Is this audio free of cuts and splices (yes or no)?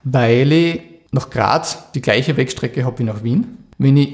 yes